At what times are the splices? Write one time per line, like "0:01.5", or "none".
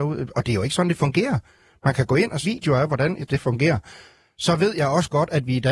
0:02.4
0:03.3